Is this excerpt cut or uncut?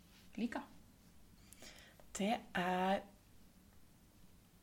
uncut